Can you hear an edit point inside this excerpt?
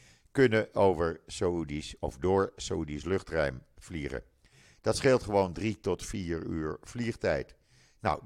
no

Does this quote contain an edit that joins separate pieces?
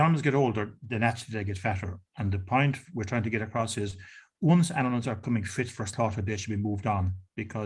no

